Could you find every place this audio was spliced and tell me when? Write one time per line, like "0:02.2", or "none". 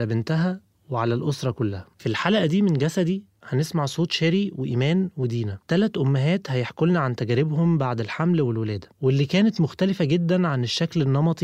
0:01.9
0:05.6
0:08.9

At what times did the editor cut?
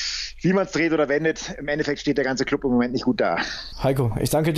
none

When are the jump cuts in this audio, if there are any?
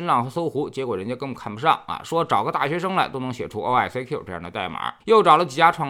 0:05.0

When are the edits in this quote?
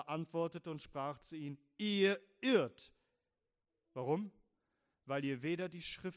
none

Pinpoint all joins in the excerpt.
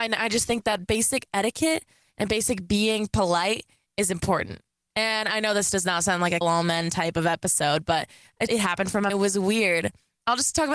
0:06.4
0:08.5
0:09.1

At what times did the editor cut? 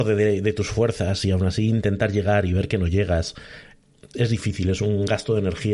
0:04.1

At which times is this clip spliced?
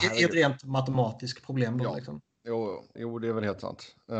0:03.0

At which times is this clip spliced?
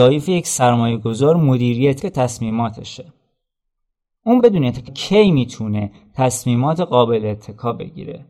0:02.0
0:04.4
0:04.9

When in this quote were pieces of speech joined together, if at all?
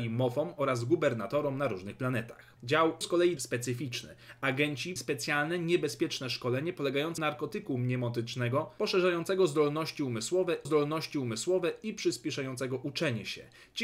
0:03.0
0:03.4
0:05.0
0:07.2
0:10.7

